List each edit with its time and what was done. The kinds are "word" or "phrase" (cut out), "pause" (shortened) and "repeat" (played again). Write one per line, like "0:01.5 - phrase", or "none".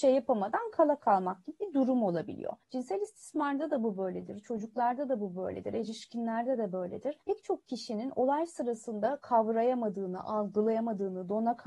0:02.6 - pause
0:07.2 - pause